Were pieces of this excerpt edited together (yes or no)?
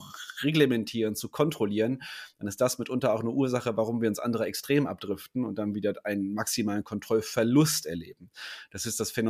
no